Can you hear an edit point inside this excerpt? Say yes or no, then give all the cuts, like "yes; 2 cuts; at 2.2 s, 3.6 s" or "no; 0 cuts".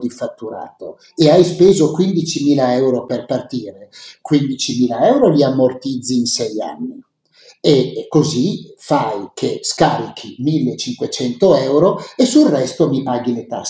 no; 0 cuts